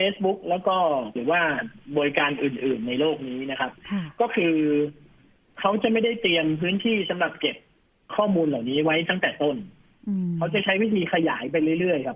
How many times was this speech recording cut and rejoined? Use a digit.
1